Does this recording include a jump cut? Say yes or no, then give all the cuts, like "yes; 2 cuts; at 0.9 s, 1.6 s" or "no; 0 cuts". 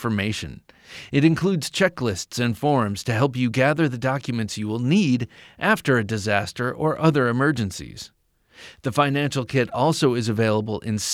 no; 0 cuts